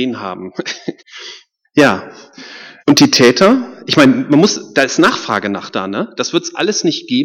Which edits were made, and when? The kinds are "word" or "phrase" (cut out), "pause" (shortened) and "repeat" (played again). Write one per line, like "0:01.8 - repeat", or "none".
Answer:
0:01.0 - pause
0:02.8 - pause